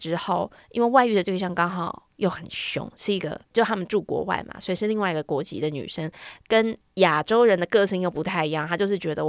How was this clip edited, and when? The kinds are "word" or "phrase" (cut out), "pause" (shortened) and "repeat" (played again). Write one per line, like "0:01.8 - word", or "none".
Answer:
0:02.1 - pause
0:03.5 - pause
0:06.9 - pause